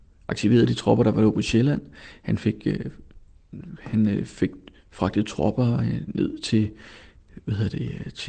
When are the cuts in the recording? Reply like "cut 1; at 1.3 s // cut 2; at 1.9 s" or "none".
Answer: none